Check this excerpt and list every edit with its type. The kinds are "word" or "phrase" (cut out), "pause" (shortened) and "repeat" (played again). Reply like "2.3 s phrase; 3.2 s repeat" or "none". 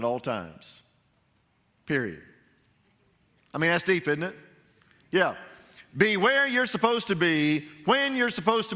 none